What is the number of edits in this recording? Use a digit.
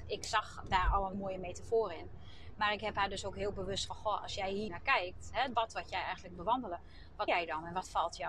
6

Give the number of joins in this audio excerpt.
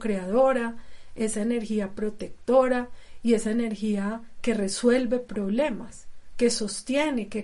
0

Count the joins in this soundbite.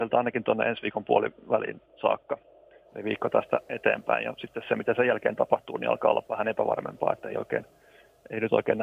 0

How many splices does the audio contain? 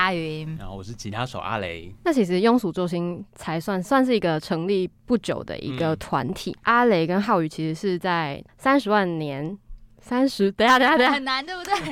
0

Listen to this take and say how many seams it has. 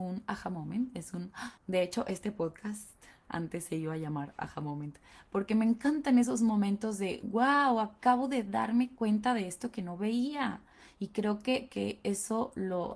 2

